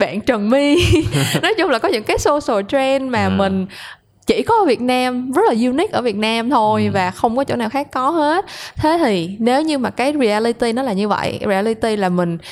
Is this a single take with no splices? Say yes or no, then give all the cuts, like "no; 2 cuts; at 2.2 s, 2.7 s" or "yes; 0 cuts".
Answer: yes; 0 cuts